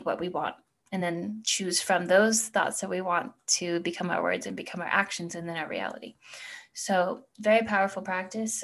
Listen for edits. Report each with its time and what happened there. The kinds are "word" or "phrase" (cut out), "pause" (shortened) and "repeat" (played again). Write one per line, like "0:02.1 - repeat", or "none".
none